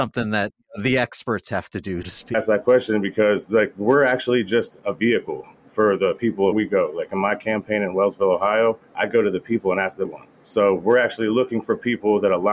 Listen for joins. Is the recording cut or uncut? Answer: cut